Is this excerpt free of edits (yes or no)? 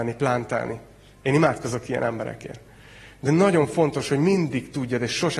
yes